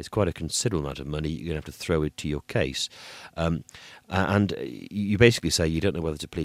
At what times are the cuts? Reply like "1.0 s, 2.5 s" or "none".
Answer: none